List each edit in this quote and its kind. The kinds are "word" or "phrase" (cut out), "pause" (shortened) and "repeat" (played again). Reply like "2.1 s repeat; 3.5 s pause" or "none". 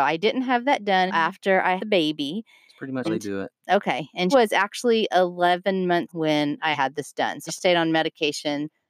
1.1 s word; 1.8 s word; 3.0 s word; 4.3 s word; 6.1 s word; 6.7 s word; 7.5 s word

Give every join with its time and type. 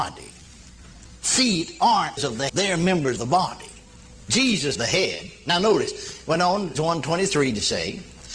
2.2 s word; 2.5 s word; 3.2 s word; 4.7 s word; 6.7 s word

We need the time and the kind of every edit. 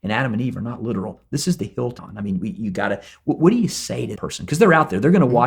2.0 s word; 4.2 s word

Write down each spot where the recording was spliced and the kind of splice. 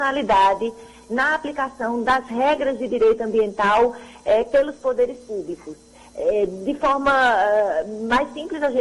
none

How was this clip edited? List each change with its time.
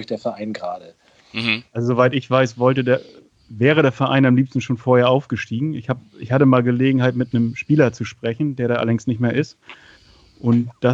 none

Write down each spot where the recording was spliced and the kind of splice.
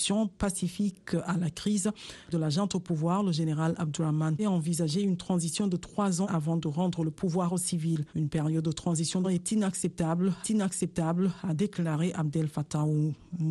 2.3 s phrase; 4.4 s phrase; 6.2 s word; 8.1 s pause; 9.2 s phrase; 10.4 s repeat

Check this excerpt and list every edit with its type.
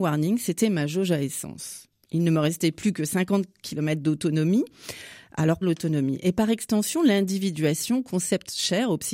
5.6 s word

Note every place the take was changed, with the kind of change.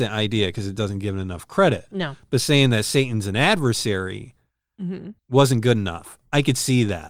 5.2 s pause

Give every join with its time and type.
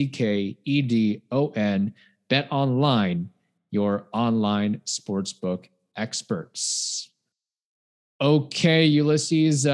none

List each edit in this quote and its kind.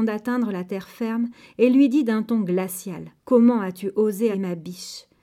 3.2 s pause; 4.3 s word

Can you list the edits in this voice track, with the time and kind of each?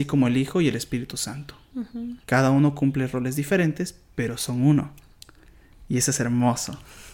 2.2 s pause

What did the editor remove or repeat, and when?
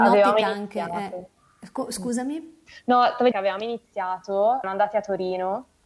3.3 s word; 4.6 s word

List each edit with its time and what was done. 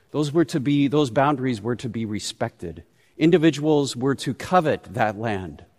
none

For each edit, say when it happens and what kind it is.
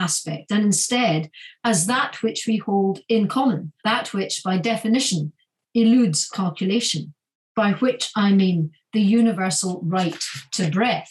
3.8 s pause; 6.3 s word

